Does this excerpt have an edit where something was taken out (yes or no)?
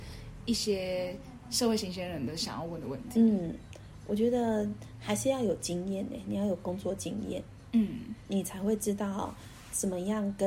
yes